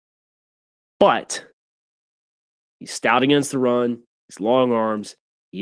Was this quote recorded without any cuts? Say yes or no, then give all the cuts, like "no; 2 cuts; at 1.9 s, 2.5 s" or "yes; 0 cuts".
yes; 0 cuts